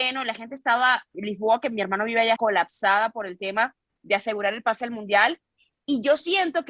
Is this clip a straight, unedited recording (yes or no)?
no